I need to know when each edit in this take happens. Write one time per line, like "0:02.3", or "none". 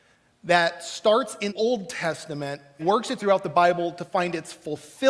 0:01.5
0:02.8
0:03.2